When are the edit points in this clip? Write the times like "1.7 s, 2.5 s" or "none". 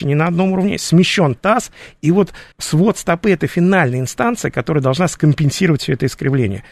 2.5 s